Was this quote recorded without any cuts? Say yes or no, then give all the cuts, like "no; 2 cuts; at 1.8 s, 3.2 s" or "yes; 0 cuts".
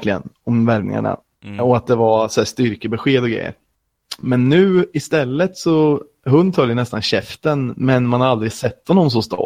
no; 1 cut; at 1.3 s